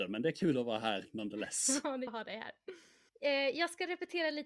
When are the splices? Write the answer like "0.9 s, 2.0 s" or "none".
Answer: 2.1 s